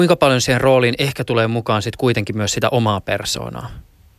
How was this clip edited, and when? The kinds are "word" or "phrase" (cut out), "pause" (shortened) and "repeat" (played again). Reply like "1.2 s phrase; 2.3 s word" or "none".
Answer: none